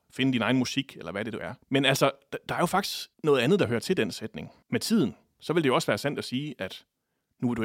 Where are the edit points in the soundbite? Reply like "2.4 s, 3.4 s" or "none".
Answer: 1.6 s, 3.1 s, 4.6 s